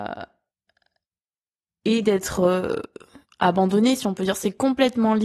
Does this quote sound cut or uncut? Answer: uncut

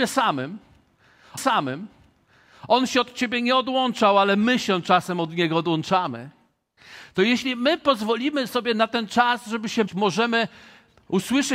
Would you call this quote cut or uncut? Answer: cut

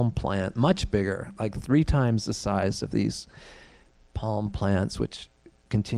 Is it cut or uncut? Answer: uncut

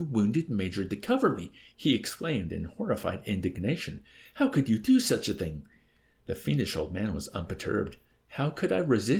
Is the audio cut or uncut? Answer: uncut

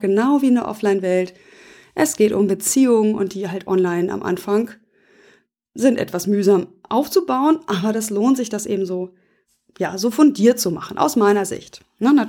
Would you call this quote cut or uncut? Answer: uncut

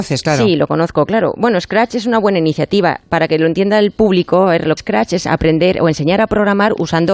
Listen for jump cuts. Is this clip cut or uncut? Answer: cut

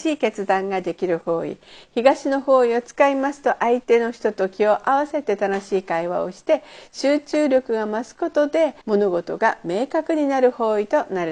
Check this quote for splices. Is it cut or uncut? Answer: cut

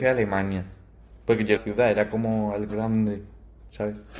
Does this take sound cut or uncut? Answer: cut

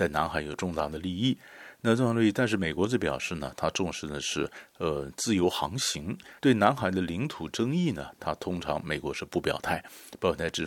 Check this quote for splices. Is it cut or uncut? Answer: cut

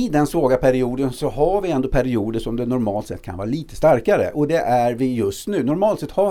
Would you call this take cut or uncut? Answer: uncut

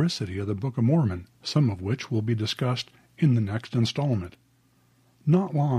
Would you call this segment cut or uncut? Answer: cut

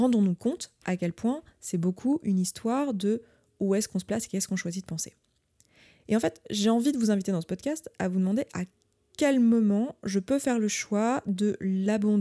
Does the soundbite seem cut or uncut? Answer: uncut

